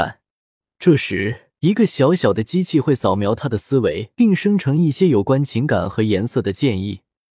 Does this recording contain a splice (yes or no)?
yes